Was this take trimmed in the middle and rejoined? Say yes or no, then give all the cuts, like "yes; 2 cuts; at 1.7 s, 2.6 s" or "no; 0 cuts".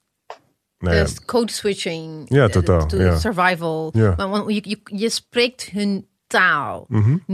no; 0 cuts